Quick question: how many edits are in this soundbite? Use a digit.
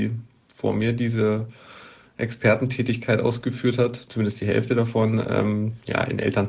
0